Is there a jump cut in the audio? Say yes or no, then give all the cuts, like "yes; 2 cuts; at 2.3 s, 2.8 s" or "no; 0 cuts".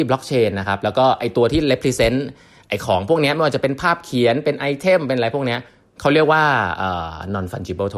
yes; 1 cut; at 5.7 s